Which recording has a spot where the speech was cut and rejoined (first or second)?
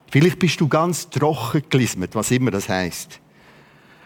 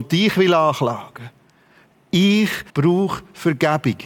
second